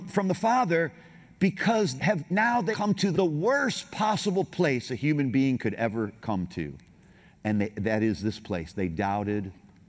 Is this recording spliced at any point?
yes; 3 cuts; at 2.0 s, 2.7 s, 3.1 s

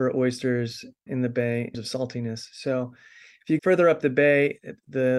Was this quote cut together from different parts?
yes; 3 cuts; at 1.1 s, 1.7 s, 3.6 s

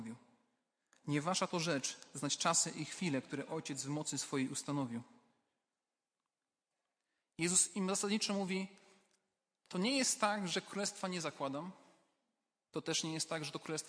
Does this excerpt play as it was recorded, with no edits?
yes; 0 cuts

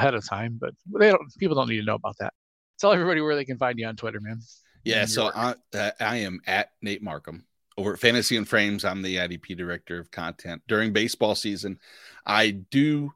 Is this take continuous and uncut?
yes; 0 cuts

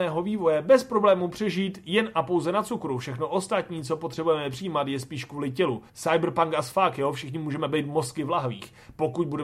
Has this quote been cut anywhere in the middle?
yes; 1 cut; at 5.9 s

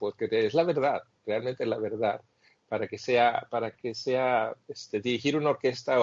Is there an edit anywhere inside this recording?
no; 0 cuts

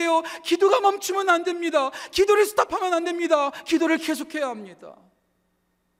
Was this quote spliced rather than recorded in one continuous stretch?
no; 0 cuts

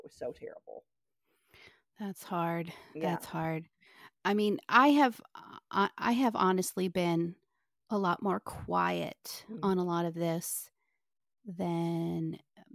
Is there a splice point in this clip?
no; 0 cuts

